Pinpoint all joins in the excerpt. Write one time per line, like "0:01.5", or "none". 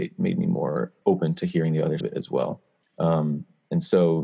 0:01.0
0:02.0
0:02.8